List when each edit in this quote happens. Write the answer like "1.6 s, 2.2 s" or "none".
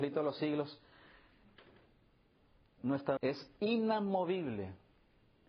3.2 s